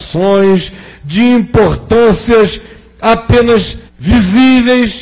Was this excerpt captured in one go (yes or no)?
no